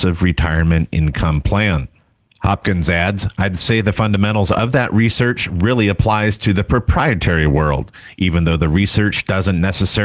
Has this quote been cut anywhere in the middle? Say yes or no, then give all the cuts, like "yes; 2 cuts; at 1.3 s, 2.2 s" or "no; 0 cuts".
no; 0 cuts